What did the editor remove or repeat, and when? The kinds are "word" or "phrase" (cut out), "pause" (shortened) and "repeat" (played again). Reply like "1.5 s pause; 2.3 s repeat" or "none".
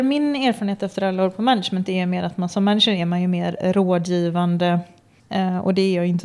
none

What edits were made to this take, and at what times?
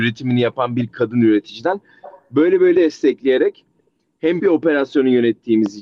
2.7 s word; 4.4 s word

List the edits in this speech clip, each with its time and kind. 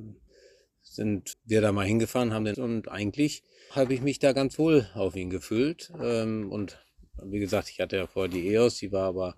1.3 s word; 2.5 s word; 3.7 s word

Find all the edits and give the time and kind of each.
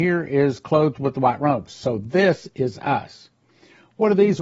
none

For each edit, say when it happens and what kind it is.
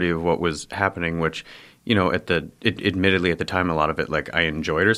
none

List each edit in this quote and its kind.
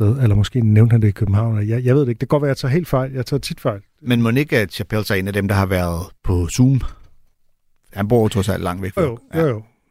9.0 s word

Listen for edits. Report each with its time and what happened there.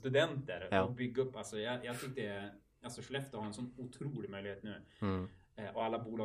none

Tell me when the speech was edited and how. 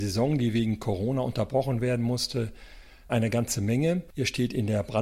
3.1 s word

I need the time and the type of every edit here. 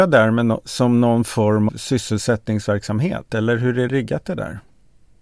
1.7 s word; 3.9 s word

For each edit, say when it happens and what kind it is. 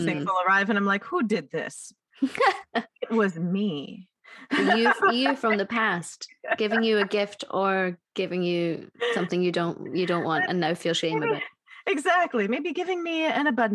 8.1 s pause

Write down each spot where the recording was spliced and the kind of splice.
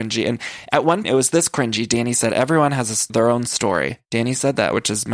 1.0 s word; 3.1 s word; 4.0 s pause

